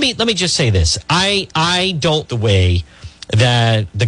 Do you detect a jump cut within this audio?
yes; 1 cut; at 2.3 s

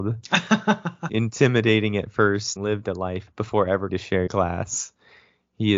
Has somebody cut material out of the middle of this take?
yes; 5 cuts; at 1.1 s, 2.6 s, 3.3 s, 3.9 s, 4.3 s

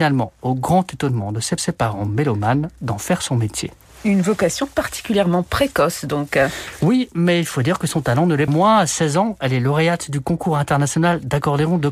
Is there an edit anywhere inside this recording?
yes; 2 cuts; at 1.6 s, 8.5 s

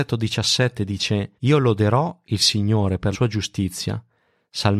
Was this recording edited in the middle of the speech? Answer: yes; 2 cuts; at 1.4 s, 3.1 s

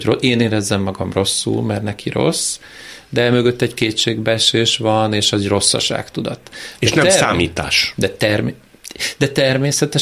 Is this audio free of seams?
yes; 0 cuts

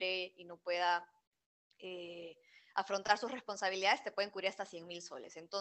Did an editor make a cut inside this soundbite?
no; 0 cuts

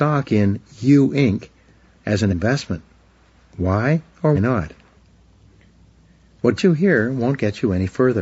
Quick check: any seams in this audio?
yes; 3 cuts; at 2.3 s, 4.3 s, 6.6 s

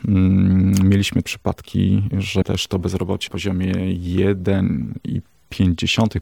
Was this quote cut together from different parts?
yes; 3 cuts; at 1.2 s, 2.4 s, 3.3 s

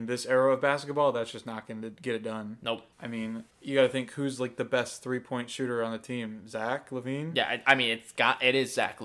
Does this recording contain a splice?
yes; 2 cuts; at 2.9 s, 3.5 s

